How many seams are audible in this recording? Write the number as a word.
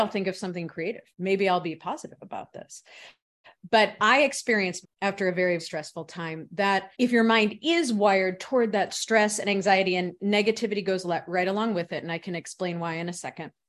four